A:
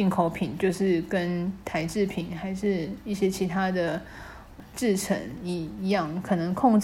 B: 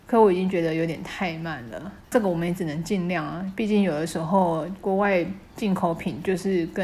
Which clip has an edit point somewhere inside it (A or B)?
B